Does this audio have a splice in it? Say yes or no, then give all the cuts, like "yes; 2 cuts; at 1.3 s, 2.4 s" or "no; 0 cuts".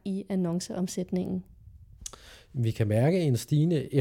no; 0 cuts